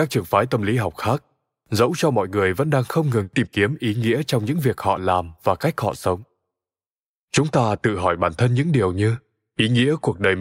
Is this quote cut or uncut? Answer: uncut